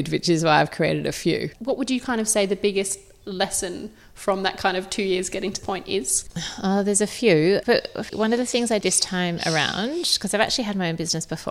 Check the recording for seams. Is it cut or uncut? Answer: cut